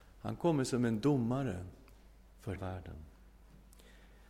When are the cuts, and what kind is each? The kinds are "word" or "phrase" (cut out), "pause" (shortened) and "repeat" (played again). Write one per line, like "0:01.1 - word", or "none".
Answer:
0:02.6 - word